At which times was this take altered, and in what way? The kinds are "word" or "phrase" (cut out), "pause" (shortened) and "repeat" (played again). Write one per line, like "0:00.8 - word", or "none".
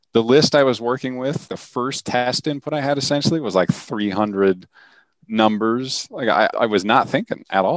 0:01.5 - word
0:06.5 - word